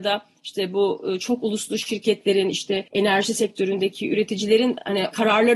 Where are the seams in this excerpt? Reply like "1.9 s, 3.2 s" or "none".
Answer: 2.9 s